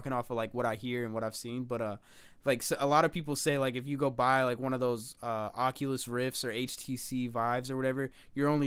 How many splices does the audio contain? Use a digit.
0